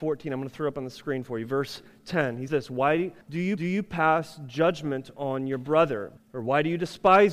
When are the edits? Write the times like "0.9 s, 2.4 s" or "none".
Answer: 2.5 s, 3.2 s, 3.6 s, 6.2 s